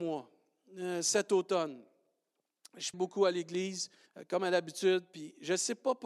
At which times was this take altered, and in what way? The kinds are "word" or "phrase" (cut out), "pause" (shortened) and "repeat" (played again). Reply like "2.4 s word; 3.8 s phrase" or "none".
2.9 s word; 4.1 s pause